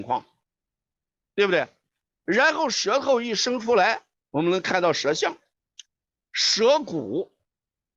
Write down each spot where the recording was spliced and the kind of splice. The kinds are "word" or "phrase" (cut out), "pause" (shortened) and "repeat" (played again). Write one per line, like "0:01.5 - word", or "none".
none